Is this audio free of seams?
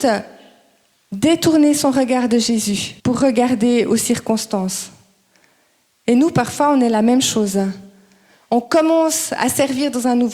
no; 1 cut; at 3.0 s

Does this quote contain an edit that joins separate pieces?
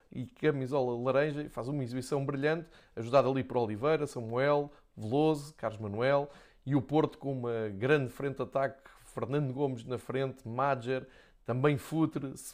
no; 0 cuts

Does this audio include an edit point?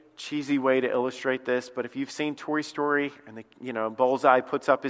no; 0 cuts

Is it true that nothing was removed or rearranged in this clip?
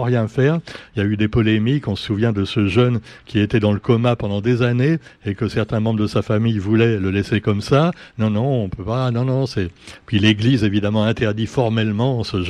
yes; 0 cuts

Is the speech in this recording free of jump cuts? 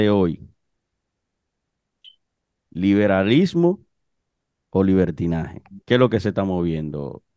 no; 2 cuts; at 2.2 s, 5.8 s

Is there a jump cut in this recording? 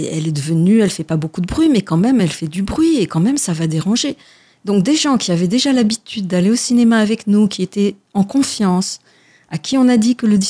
no; 0 cuts

